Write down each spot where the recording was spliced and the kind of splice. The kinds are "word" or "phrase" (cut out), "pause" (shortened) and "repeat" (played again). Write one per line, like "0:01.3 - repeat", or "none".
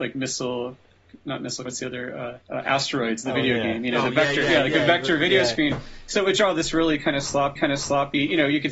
0:01.7 - word
0:02.4 - pause
0:07.6 - repeat